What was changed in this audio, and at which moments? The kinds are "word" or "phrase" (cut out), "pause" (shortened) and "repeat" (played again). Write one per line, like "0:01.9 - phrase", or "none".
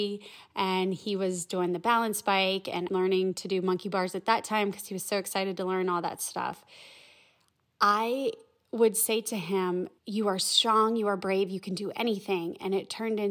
0:02.9 - word
0:10.0 - pause